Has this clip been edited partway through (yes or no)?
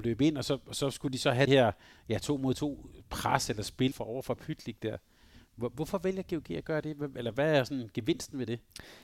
yes